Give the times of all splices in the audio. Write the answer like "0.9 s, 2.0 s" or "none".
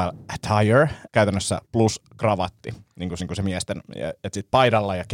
1.1 s, 1.7 s, 3.2 s